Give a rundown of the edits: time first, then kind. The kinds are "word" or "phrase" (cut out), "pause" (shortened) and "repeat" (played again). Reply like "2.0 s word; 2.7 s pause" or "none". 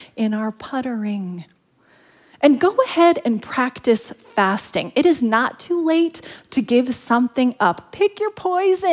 none